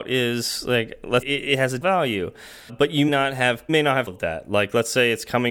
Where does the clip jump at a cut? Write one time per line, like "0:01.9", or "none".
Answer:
0:01.2
0:01.8
0:02.7
0:03.1
0:03.7
0:04.1